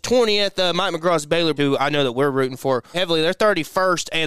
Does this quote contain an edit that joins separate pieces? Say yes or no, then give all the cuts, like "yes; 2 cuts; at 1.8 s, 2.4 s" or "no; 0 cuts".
yes; 2 cuts; at 1.6 s, 2.9 s